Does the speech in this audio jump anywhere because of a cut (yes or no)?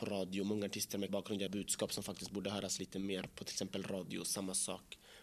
yes